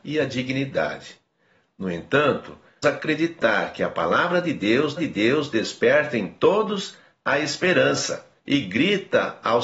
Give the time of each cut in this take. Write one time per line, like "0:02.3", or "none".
0:02.8
0:05.0
0:08.4